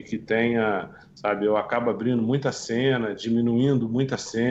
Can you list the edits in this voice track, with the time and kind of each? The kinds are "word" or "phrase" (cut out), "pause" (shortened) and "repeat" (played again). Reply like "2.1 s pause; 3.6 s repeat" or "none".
none